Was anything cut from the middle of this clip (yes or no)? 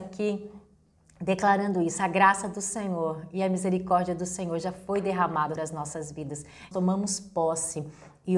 yes